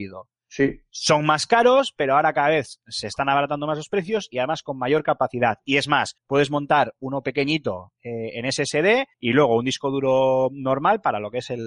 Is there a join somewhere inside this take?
yes; 2 cuts; at 6.2 s, 9.1 s

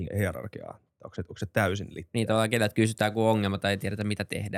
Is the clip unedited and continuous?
yes; 0 cuts

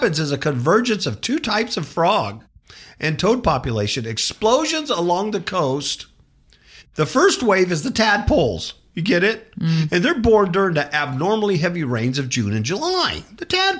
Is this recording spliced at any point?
no; 0 cuts

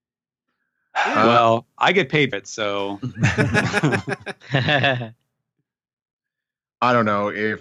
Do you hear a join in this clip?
yes; 1 cut; at 2.3 s

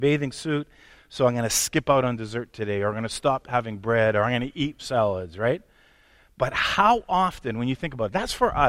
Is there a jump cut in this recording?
yes; 1 cut; at 4.8 s

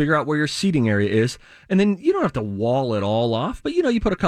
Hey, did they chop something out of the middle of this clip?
no; 0 cuts

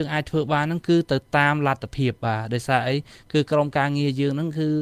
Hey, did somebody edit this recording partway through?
no; 0 cuts

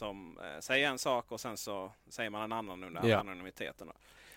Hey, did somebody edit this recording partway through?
yes; 1 cut; at 2.0 s

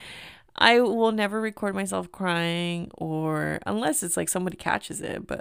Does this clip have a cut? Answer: no; 0 cuts

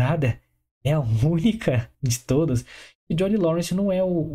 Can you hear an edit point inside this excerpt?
yes; 1 cut; at 1.9 s

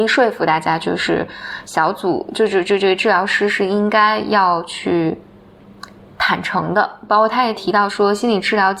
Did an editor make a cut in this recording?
yes; 1 cut; at 6.0 s

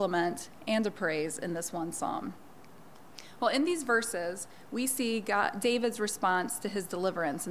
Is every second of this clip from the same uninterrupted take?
yes; 0 cuts

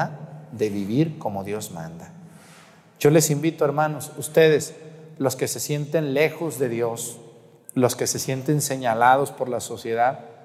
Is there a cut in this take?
no; 0 cuts

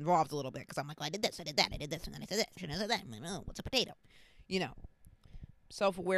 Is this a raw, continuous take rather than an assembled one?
no; 1 cut; at 2.6 s

